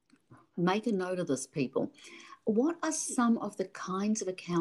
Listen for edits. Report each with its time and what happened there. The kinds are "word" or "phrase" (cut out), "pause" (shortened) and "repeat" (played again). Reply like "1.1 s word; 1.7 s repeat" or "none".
none

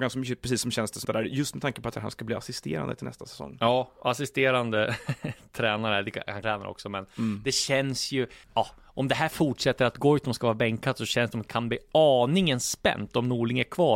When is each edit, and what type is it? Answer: 1.0 s phrase; 1.9 s phrase; 6.4 s phrase; 8.4 s pause; 11.3 s word

